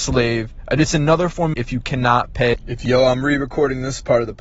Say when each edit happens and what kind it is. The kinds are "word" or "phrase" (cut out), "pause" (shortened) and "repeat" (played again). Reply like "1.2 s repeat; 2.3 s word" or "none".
1.5 s phrase